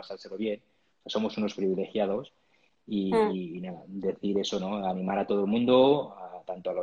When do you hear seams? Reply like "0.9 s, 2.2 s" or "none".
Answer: none